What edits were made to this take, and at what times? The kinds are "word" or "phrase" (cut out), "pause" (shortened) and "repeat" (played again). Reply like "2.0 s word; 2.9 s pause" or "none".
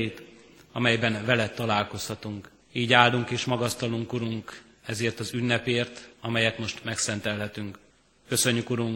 2.6 s pause; 6.1 s pause; 7.9 s pause